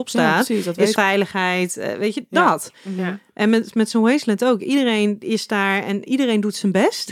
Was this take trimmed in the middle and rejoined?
yes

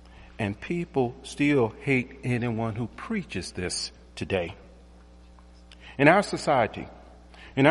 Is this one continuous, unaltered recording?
yes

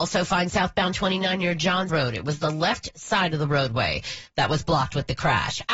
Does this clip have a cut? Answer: yes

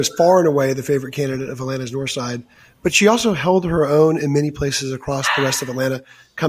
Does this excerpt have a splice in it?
no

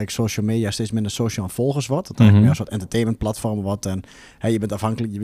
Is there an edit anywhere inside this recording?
no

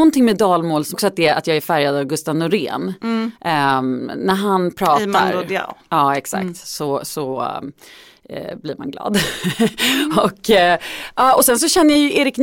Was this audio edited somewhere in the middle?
yes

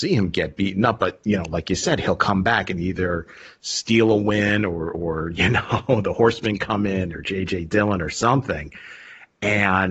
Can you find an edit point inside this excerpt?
no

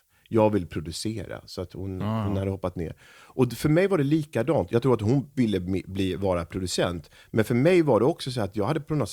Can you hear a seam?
no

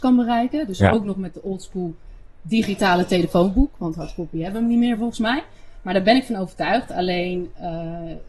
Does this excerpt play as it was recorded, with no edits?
yes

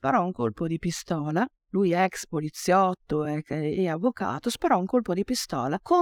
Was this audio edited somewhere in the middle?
no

